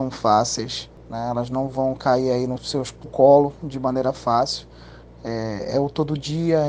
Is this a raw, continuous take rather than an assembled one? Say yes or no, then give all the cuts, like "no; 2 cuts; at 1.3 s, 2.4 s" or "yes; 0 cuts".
no; 2 cuts; at 2.6 s, 3.1 s